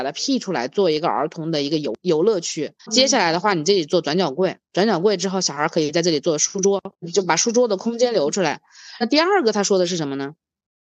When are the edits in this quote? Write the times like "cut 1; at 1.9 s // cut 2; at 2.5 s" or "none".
cut 1; at 2.8 s // cut 2; at 4.6 s // cut 3; at 6.9 s